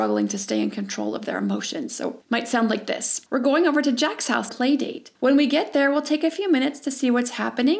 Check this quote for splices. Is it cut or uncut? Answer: cut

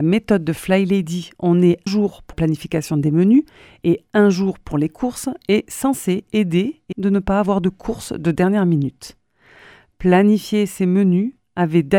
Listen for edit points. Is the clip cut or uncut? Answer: cut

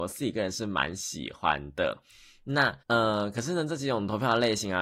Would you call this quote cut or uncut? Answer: cut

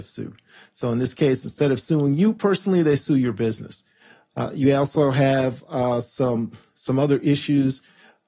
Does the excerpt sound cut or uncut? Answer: uncut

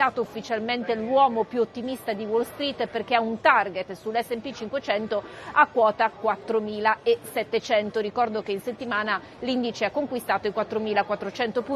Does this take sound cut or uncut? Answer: uncut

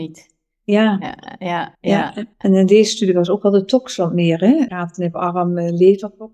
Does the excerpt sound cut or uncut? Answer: cut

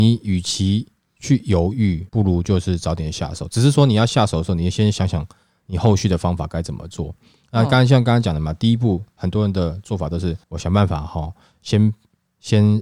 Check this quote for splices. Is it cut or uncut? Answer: cut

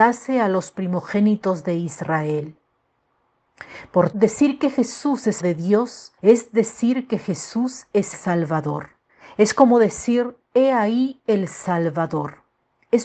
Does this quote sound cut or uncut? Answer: cut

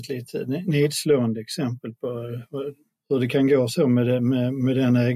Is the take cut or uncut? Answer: uncut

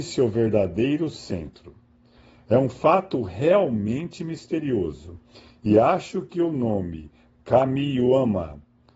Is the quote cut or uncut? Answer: uncut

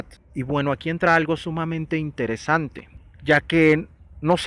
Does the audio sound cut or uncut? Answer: uncut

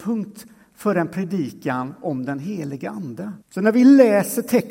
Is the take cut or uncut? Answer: cut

